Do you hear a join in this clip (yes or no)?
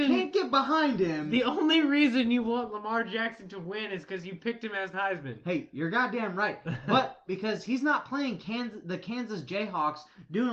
yes